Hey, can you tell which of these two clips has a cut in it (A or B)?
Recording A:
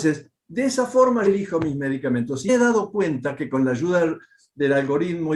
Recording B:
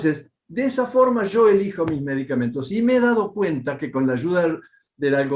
A